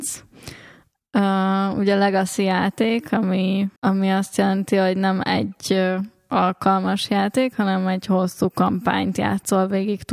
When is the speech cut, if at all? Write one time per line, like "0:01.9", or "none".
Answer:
0:03.8